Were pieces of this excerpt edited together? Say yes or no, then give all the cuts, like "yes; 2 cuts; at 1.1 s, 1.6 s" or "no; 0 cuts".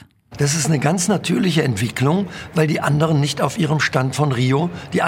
no; 0 cuts